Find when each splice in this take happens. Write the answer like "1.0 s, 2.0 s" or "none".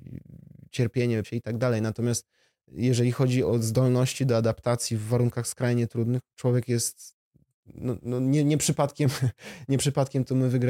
1.2 s